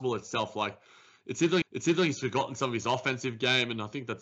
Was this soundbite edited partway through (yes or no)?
yes